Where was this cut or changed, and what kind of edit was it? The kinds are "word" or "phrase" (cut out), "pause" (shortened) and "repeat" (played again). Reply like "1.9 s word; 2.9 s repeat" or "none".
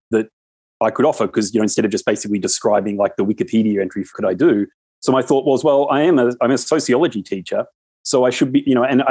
4.1 s phrase